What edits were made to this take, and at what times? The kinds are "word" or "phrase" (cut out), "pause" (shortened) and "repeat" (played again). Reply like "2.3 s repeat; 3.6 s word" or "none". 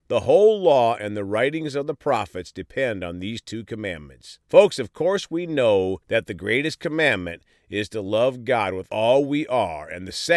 4.4 s pause; 6.0 s pause